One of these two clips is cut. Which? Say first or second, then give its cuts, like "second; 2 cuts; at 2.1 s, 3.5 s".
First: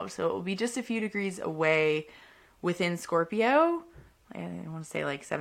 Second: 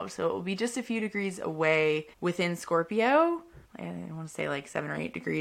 second; 2 cuts; at 2.1 s, 3.6 s